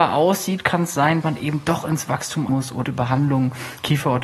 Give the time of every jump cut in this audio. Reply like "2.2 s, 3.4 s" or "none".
1.2 s, 2.5 s, 2.8 s

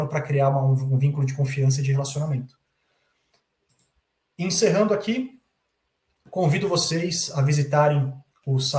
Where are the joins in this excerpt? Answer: none

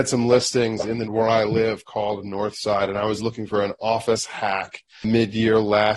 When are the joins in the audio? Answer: 1.1 s

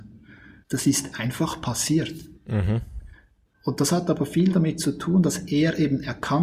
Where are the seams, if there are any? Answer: 2.3 s

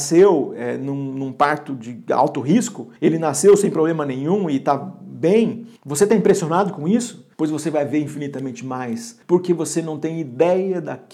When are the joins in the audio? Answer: 3.0 s, 5.8 s, 7.3 s, 9.2 s

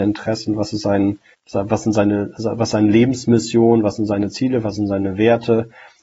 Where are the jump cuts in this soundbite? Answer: 1.3 s

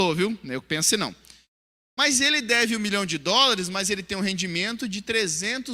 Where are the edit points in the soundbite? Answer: none

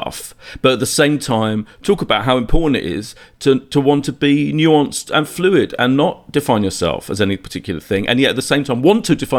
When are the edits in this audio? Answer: none

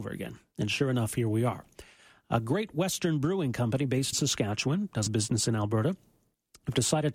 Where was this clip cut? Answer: 4.1 s, 5.1 s

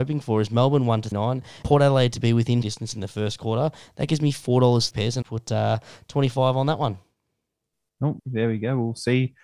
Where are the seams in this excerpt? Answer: 1.1 s, 1.6 s, 2.6 s, 4.9 s, 5.2 s, 8.2 s

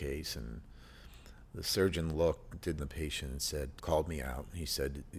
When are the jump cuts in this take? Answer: 2.8 s, 3.8 s

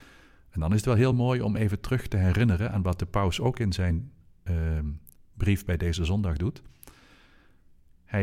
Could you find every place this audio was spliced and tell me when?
none

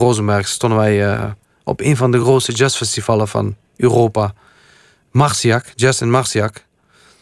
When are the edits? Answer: none

